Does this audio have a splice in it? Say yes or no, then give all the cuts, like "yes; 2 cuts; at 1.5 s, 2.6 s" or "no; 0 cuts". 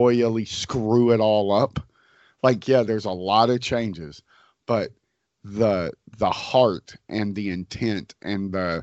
no; 0 cuts